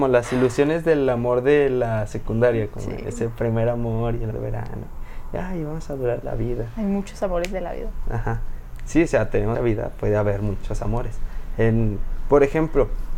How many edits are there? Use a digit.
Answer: 3